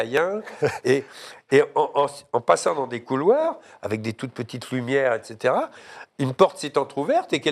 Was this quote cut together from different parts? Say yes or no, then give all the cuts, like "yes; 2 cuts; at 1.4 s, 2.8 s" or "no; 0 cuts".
no; 0 cuts